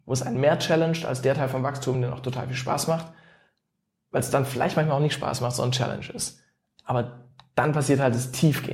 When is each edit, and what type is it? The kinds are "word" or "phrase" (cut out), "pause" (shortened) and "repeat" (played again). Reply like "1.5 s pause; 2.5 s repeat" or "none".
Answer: none